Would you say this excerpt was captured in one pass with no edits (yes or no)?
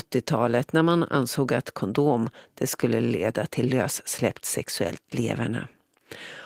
yes